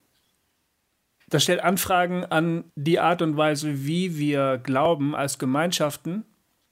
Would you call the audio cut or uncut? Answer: cut